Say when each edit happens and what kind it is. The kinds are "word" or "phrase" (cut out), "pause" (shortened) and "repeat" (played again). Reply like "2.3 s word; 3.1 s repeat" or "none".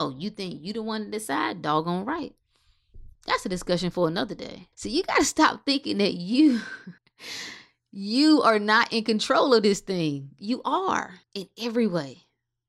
3.1 s pause; 4.7 s pause; 7.0 s pause; 11.2 s pause